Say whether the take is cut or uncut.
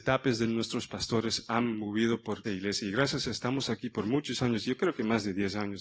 cut